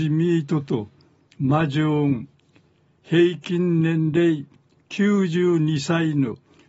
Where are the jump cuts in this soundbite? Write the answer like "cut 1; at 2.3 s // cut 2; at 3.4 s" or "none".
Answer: none